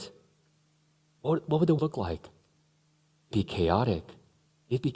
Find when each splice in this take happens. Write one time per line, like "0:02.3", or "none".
0:01.8
0:03.3